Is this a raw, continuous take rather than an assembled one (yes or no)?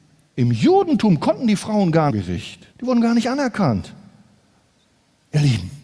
no